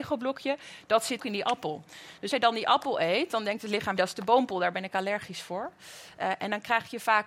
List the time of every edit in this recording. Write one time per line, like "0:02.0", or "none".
0:01.2
0:02.3
0:04.0